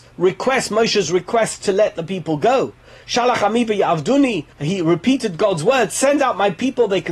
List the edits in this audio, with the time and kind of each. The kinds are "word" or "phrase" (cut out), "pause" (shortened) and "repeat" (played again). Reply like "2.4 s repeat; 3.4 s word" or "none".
4.5 s pause